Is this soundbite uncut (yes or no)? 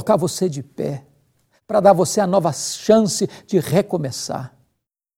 yes